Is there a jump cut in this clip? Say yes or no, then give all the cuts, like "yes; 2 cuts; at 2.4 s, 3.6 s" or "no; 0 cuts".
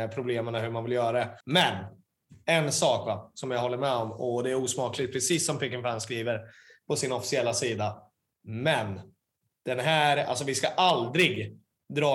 yes; 1 cut; at 1.4 s